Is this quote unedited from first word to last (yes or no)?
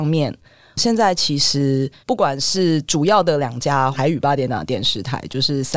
no